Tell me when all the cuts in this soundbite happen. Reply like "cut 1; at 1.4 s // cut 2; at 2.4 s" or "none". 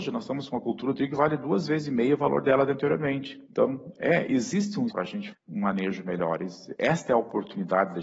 cut 1; at 4.9 s // cut 2; at 5.3 s